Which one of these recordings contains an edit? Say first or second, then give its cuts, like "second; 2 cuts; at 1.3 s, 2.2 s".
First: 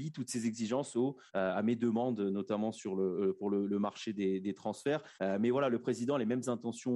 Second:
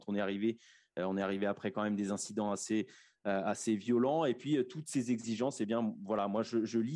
first; 2 cuts; at 1.3 s, 5.1 s